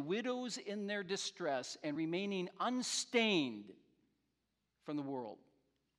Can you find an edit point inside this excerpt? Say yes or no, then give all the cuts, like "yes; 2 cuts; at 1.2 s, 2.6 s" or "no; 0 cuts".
no; 0 cuts